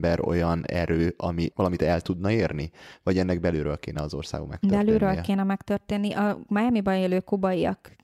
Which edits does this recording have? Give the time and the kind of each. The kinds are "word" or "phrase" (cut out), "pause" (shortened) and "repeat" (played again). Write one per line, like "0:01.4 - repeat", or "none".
none